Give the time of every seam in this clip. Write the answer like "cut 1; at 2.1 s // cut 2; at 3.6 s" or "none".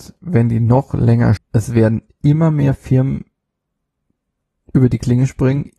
cut 1; at 1.4 s